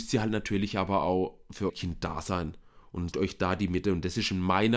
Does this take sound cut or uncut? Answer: cut